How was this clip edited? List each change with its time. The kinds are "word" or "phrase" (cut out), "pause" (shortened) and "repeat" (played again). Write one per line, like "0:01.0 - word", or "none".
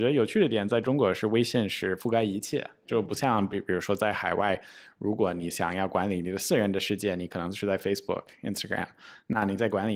none